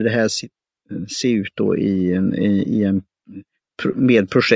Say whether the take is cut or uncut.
uncut